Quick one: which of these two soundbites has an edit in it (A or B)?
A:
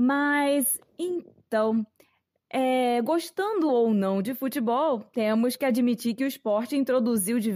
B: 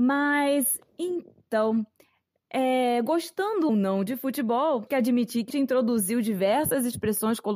B